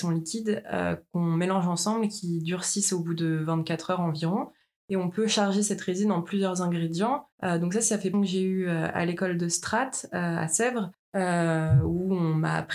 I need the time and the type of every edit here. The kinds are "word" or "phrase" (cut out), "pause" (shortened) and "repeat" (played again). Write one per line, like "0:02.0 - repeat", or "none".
0:07.3 - pause
0:08.1 - phrase